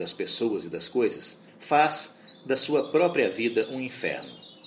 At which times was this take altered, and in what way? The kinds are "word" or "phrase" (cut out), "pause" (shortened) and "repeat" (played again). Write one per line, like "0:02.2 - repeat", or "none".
0:01.5 - pause

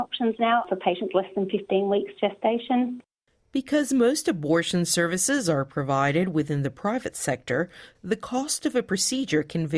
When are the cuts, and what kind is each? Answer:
none

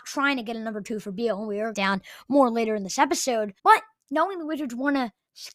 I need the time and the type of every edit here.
0:01.7 - phrase
0:03.6 - pause

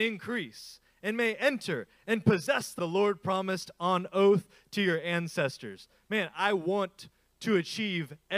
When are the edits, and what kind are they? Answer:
0:02.8 - word

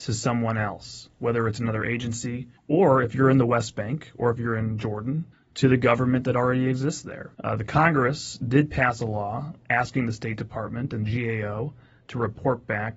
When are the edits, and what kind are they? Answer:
0:02.6 - pause
0:05.3 - pause
0:07.3 - pause

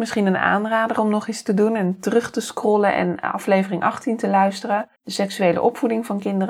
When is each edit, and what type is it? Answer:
0:05.0 - pause

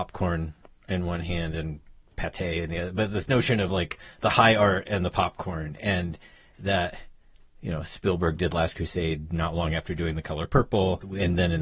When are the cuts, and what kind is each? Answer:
none

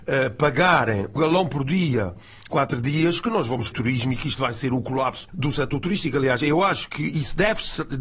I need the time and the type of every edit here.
0:01.2 - word
0:02.5 - word
0:03.7 - word
0:05.3 - word

